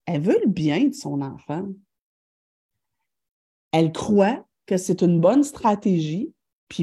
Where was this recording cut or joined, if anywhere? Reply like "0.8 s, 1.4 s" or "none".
none